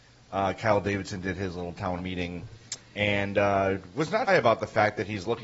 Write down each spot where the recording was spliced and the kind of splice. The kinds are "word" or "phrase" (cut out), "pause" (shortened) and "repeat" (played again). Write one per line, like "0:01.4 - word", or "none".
0:02.0 - word
0:02.8 - pause
0:04.3 - word